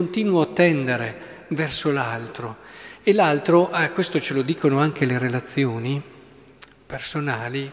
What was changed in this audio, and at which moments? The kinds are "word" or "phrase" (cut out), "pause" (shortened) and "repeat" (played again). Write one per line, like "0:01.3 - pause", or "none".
none